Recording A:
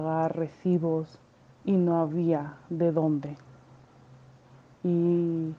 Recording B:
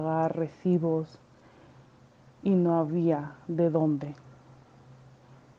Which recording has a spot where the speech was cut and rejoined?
A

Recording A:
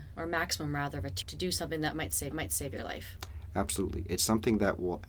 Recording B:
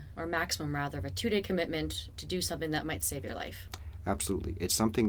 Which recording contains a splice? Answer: A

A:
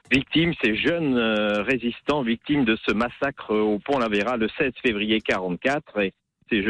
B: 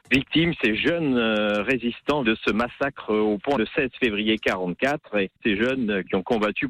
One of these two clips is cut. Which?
B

